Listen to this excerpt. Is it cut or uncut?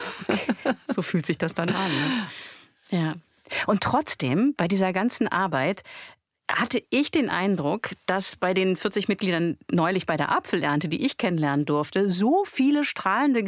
uncut